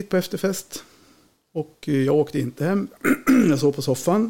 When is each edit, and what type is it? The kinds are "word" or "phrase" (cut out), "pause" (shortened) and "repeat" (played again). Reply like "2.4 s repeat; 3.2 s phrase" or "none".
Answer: none